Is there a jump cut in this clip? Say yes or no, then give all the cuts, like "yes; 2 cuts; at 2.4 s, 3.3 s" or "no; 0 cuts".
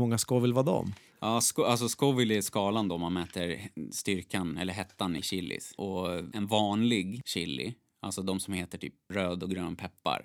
no; 0 cuts